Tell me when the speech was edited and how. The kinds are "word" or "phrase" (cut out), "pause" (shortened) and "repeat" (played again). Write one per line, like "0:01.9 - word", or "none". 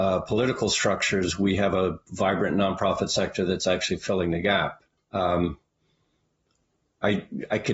0:04.9 - pause